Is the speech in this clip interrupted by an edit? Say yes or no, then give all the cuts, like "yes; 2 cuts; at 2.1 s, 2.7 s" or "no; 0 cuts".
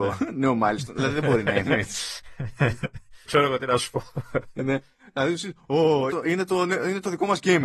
yes; 2 cuts; at 3.3 s, 6.1 s